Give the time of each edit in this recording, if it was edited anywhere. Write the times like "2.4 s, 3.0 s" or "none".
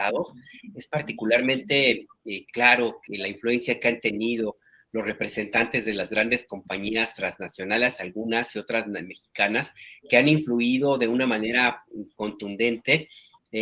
none